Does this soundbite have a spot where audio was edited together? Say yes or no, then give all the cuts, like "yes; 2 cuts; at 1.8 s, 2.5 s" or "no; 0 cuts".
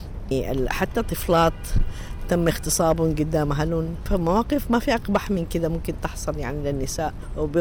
no; 0 cuts